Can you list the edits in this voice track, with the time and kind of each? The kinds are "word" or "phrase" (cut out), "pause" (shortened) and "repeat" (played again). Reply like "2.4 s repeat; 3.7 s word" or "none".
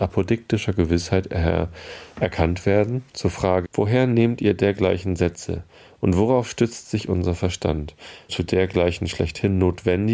3.6 s word; 8.3 s word